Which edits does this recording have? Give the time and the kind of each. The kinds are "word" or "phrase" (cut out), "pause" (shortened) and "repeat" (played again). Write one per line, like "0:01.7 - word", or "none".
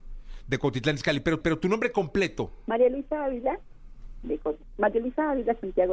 0:01.4 - repeat